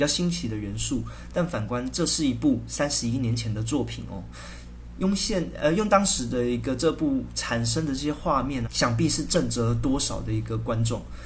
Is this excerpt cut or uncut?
cut